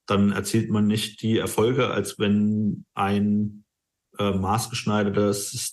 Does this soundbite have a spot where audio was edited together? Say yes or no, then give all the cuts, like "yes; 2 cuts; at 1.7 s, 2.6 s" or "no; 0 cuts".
no; 0 cuts